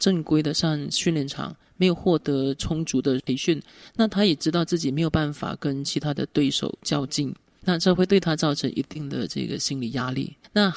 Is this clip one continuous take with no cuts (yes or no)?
yes